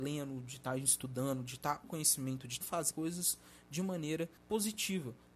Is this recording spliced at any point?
yes; 4 cuts; at 1.8 s, 2.6 s, 2.9 s, 4.4 s

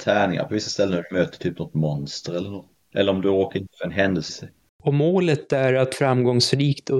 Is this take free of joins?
no; 1 cut; at 4.3 s

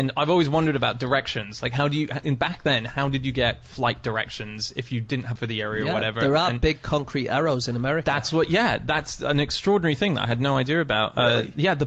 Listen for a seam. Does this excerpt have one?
yes; 1 cut; at 5.4 s

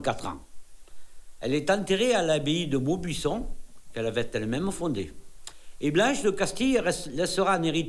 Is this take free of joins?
yes; 0 cuts

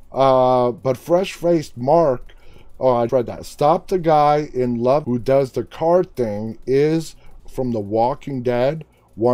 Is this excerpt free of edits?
no; 3 cuts; at 3.1 s, 5.0 s, 7.4 s

